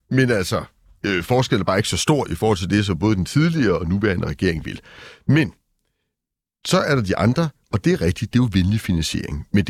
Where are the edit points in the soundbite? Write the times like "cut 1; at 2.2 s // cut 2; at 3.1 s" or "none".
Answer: none